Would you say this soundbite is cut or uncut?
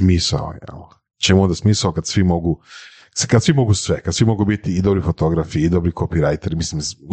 uncut